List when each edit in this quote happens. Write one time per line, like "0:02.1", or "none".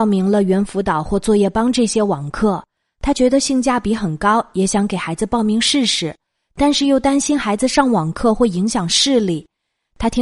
none